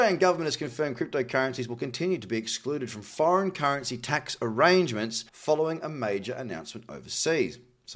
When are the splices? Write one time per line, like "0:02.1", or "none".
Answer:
0:05.3